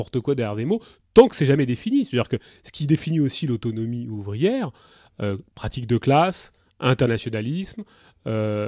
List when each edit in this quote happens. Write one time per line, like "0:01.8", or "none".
0:05.5

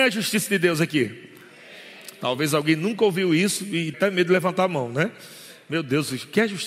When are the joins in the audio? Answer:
0:03.9

